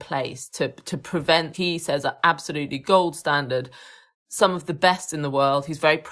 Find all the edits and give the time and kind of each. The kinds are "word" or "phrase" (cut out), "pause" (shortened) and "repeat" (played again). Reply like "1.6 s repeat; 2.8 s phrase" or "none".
1.5 s phrase